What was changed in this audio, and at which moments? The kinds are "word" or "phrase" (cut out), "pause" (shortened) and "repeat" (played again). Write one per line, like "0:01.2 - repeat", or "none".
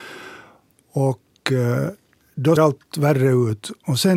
0:02.6 - word